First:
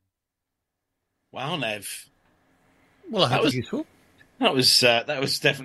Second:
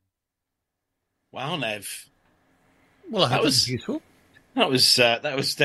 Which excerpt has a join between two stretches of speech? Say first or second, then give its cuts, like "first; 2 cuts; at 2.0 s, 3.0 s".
first; 1 cut; at 3.5 s